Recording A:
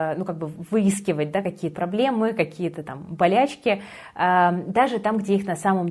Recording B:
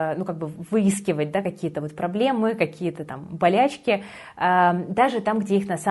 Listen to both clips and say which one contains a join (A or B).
A